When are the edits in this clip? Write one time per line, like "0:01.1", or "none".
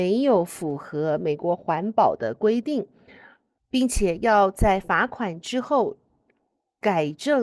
none